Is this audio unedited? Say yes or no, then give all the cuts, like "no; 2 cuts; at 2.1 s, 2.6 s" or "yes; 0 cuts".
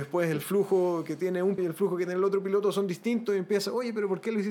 no; 1 cut; at 1.6 s